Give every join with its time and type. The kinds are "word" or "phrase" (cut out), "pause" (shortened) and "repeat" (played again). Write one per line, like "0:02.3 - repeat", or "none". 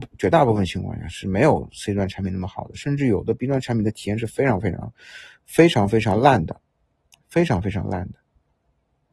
none